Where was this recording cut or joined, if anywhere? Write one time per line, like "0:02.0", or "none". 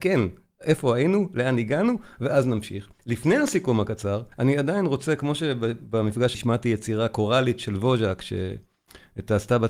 0:03.0
0:04.3
0:06.3